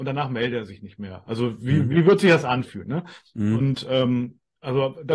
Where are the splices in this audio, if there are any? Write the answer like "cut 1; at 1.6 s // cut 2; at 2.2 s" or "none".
none